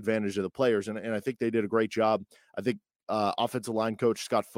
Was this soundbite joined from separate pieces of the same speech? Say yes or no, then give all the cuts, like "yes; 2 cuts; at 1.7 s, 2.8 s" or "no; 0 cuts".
no; 0 cuts